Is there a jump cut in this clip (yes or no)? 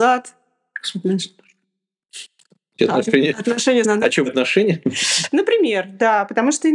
yes